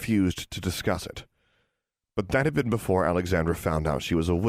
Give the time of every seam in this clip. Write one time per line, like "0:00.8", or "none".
none